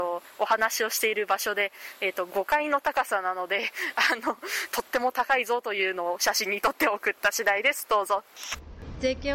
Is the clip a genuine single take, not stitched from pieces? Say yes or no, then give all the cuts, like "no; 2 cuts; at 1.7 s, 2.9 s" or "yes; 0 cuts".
yes; 0 cuts